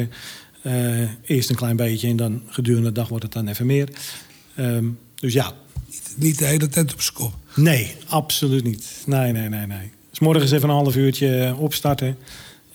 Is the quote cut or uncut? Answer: uncut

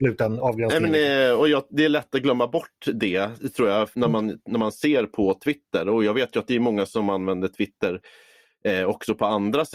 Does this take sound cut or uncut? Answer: cut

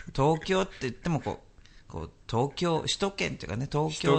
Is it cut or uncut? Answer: uncut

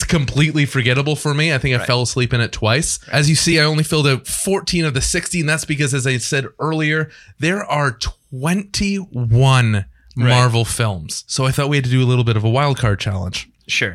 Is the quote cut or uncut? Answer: uncut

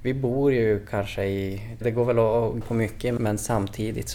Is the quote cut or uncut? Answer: cut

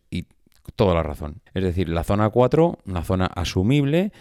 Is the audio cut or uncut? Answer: cut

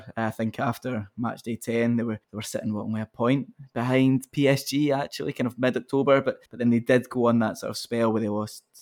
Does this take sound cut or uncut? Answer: cut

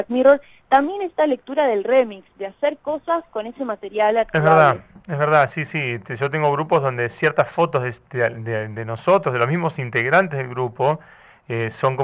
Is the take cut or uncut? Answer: uncut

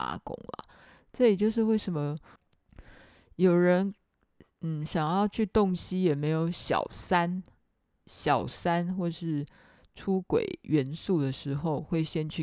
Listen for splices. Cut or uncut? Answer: uncut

